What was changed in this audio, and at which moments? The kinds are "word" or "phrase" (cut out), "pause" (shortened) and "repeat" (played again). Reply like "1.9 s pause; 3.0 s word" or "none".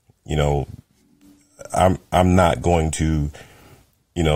none